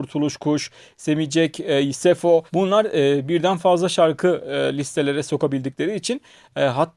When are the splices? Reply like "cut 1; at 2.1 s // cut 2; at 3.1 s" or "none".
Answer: cut 1; at 2.5 s